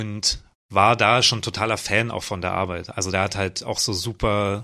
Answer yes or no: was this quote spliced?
no